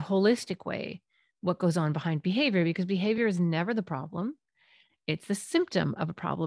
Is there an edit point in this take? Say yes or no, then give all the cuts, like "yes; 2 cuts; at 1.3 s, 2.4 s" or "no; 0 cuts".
no; 0 cuts